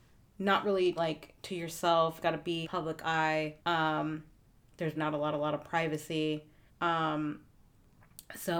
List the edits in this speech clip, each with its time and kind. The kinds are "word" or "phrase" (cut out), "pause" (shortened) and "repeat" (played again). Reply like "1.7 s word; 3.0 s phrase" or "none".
1.0 s word; 1.4 s pause; 2.2 s word; 2.6 s phrase; 3.6 s pause; 4.9 s word; 5.3 s repeat; 6.7 s pause